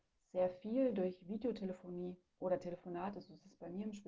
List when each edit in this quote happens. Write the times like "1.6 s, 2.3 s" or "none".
2.3 s